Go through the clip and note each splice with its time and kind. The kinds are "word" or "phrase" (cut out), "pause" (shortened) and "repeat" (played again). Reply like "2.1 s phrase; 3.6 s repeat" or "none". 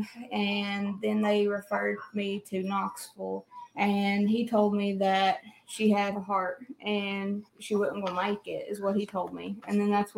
3.7 s pause; 6.1 s word; 7.5 s pause